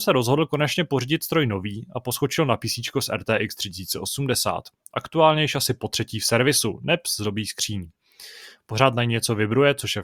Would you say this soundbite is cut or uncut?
uncut